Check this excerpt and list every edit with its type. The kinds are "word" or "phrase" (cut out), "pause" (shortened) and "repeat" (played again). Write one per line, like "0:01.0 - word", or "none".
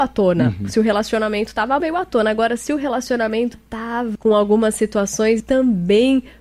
0:01.8 - word
0:03.5 - word
0:04.1 - word
0:05.4 - word